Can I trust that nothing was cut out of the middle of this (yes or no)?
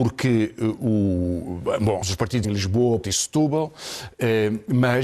no